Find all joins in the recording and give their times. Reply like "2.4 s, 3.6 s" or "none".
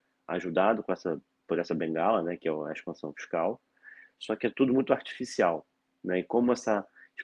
none

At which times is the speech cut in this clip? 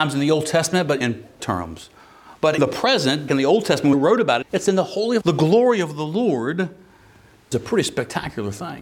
1.0 s, 1.4 s, 2.6 s, 3.3 s, 3.9 s, 4.4 s, 5.2 s, 7.5 s

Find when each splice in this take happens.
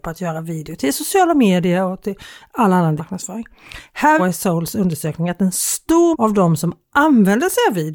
3.0 s, 4.2 s, 6.1 s

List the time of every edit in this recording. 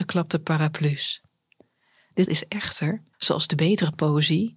2.3 s, 3.1 s

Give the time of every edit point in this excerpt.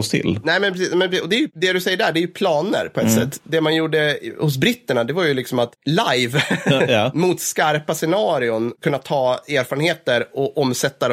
none

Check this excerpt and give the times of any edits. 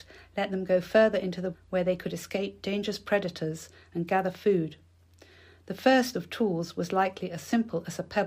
1.5 s, 6.1 s

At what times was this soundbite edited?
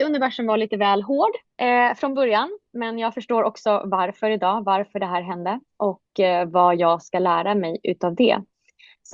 1.4 s, 5.7 s

